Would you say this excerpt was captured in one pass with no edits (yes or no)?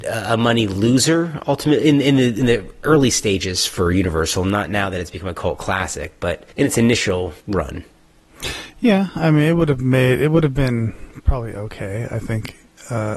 no